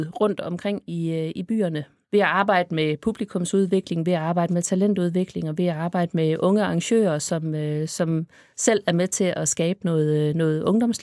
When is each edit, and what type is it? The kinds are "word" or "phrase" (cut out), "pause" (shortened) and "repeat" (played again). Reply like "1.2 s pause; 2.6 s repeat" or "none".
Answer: none